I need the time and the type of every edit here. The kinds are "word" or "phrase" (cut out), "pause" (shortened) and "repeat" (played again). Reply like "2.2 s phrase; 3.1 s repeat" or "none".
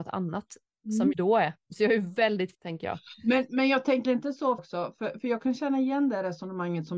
1.1 s word; 2.5 s word; 4.1 s word; 4.6 s phrase